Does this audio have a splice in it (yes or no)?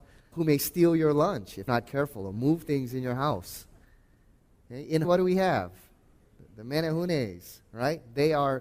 yes